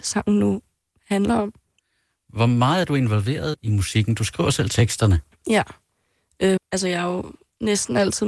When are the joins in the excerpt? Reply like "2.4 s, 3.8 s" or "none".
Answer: 3.5 s, 6.6 s